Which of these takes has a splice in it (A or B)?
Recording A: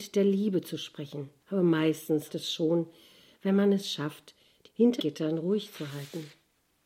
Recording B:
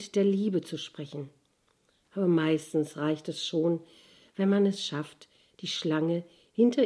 A